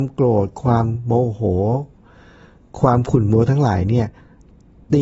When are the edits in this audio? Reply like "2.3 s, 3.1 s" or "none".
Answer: none